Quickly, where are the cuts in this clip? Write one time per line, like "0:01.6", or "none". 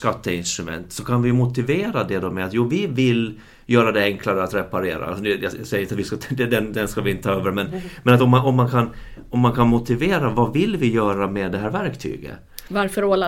none